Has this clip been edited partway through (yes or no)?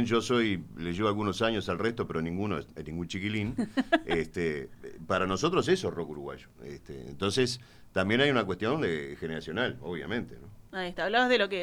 yes